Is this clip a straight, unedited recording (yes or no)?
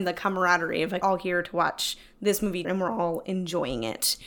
no